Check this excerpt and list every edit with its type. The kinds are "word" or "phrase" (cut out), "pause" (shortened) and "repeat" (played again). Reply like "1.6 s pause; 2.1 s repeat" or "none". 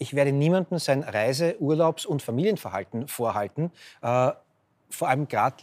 2.2 s phrase